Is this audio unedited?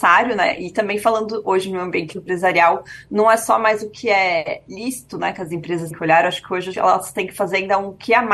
no; 2 cuts; at 5.9 s, 6.7 s

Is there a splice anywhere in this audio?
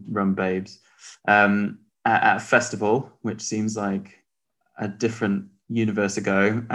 no; 0 cuts

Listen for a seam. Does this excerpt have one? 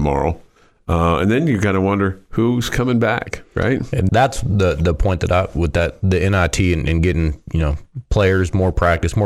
yes; 1 cut; at 4.1 s

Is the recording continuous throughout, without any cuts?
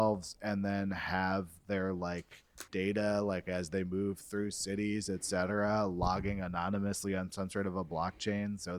no; 1 cut; at 2.7 s

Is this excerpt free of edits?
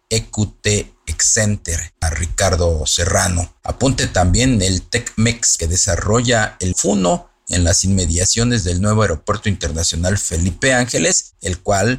no; 3 cuts; at 2.0 s, 5.6 s, 6.7 s

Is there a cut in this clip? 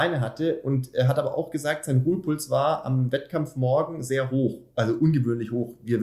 no; 0 cuts

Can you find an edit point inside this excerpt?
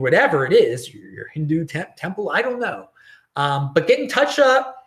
no; 0 cuts

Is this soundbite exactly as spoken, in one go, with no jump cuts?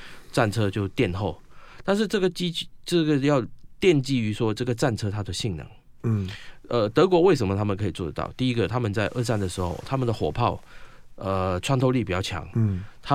yes; 0 cuts

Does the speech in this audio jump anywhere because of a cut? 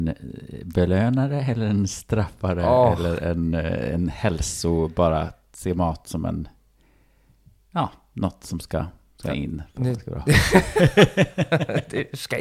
no; 0 cuts

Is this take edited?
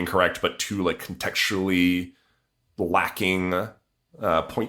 no; 0 cuts

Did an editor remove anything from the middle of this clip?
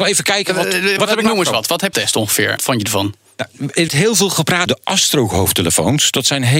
yes; 5 cuts; at 1.0 s, 1.9 s, 2.6 s, 3.9 s, 4.7 s

